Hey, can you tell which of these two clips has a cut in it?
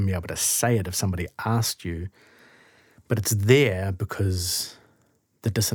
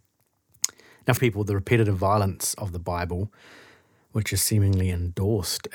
second; 1 cut; at 1.2 s

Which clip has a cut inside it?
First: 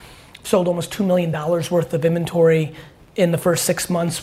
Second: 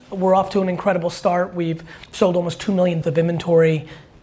second; 2 cuts; at 2.0 s, 3.0 s

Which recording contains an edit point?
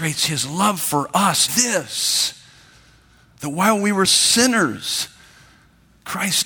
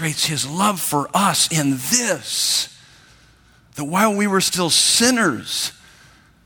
first; 2 cuts; at 1.5 s, 4.1 s

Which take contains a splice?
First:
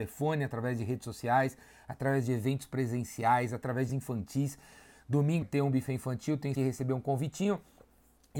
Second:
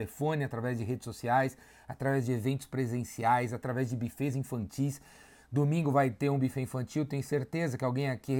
first; 3 cuts; at 3.9 s, 5.4 s, 6.6 s

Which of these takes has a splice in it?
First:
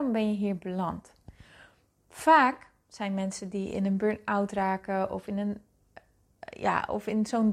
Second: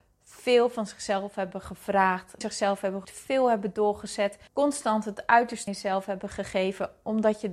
second; 4 cuts; at 2.4 s, 3.0 s, 4.5 s, 5.7 s

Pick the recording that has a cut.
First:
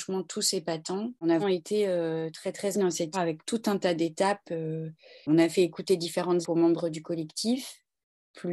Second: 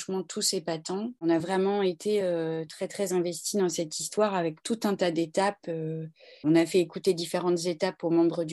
first; 4 cuts; at 1.4 s, 2.7 s, 3.1 s, 6.4 s

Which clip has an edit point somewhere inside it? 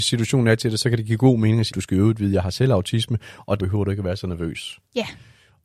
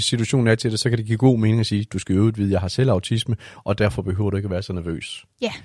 first; 2 cuts; at 1.7 s, 3.6 s

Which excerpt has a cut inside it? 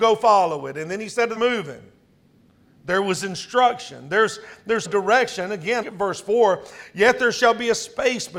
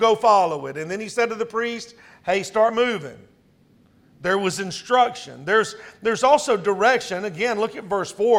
first; 3 cuts; at 1.4 s, 4.8 s, 5.8 s

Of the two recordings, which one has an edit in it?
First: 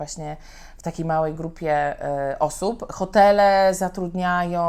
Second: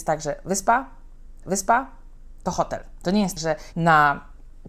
second; 3 cuts; at 1.4 s, 3.4 s, 3.7 s

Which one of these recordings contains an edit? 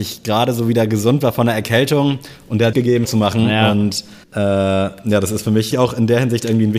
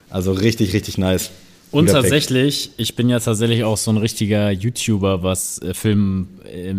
first; 4 cuts; at 2.7 s, 3.0 s, 4.2 s, 5.7 s

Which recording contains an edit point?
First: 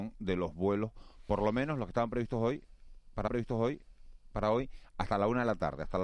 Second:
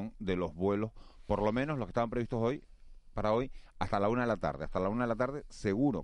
first; 1 cut; at 3.3 s

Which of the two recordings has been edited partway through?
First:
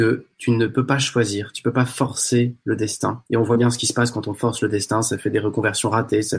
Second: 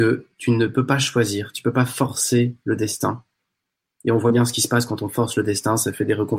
first; 1 cut; at 3.3 s

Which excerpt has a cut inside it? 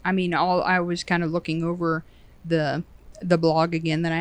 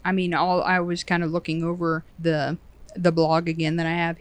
second; 1 cut; at 2.1 s

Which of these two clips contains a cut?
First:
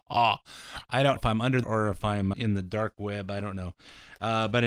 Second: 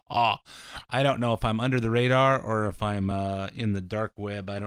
first; 3 cuts; at 1.2 s, 1.6 s, 2.3 s

